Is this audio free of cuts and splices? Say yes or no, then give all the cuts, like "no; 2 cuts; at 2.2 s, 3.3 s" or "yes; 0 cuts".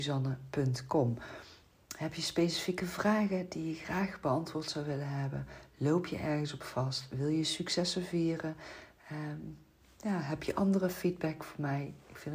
yes; 0 cuts